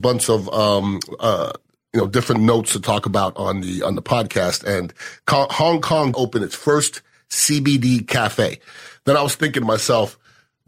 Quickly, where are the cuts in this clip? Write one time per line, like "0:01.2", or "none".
0:06.1